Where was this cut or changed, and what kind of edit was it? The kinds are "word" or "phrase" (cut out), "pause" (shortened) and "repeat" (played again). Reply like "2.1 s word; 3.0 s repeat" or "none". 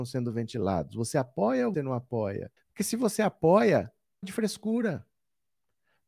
1.7 s word; 2.6 s pause; 4.2 s word